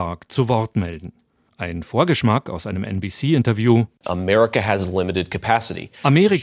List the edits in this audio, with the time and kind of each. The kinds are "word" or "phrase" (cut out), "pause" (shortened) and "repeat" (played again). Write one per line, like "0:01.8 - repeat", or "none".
none